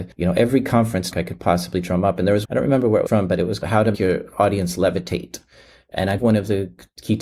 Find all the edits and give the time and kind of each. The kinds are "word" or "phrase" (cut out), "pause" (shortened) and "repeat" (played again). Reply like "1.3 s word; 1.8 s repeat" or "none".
1.1 s word; 2.4 s word; 3.1 s word; 3.6 s word; 3.9 s word; 6.2 s word